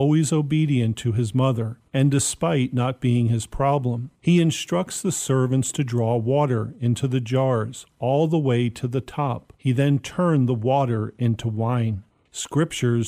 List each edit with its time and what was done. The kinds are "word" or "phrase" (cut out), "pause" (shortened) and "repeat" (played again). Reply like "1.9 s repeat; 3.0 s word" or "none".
1.9 s pause; 4.2 s pause; 9.6 s pause; 12.1 s pause